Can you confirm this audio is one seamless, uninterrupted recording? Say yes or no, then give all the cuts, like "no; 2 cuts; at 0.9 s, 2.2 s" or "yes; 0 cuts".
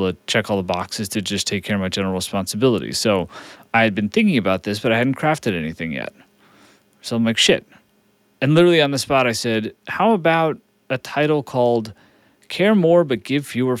yes; 0 cuts